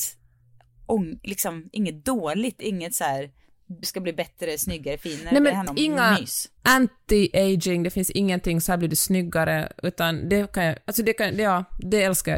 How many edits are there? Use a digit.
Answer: 3